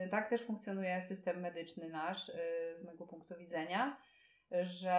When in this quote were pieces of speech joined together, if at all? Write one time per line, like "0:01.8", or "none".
none